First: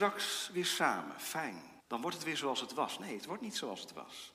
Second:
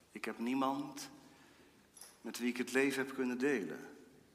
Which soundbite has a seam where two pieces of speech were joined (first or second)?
first